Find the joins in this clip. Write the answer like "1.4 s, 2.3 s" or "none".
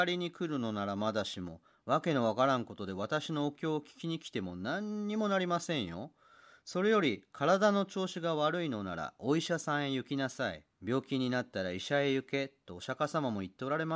10.7 s